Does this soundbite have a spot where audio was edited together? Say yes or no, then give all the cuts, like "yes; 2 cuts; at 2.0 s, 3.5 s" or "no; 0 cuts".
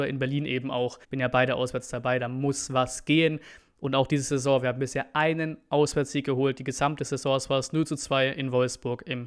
yes; 1 cut; at 1.0 s